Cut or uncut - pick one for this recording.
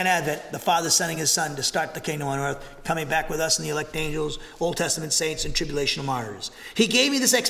uncut